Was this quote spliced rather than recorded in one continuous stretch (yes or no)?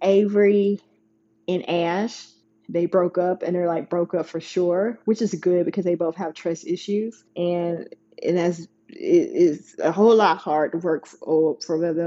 yes